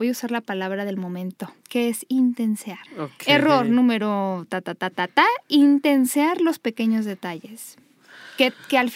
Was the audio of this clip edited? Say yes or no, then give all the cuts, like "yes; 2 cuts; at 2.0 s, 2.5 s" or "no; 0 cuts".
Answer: yes; 2 cuts; at 1.6 s, 2.9 s